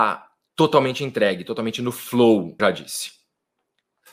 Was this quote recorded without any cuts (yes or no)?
no